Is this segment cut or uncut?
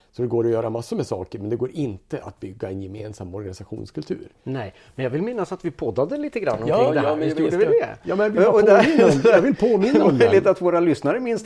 uncut